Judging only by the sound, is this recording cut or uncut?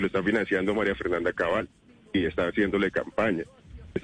uncut